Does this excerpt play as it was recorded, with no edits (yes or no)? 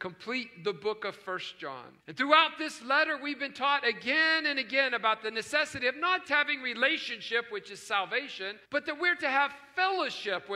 no